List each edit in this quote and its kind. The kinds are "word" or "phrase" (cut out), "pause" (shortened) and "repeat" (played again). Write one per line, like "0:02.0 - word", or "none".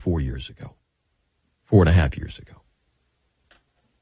none